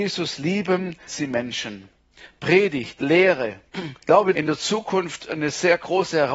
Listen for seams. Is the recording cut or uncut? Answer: cut